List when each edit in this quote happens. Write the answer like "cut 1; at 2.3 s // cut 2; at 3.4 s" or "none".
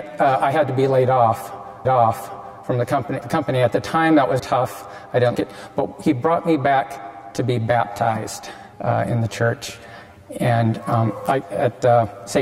cut 1; at 1.8 s // cut 2; at 3.2 s // cut 3; at 4.4 s // cut 4; at 5.3 s // cut 5; at 8.7 s // cut 6; at 11.4 s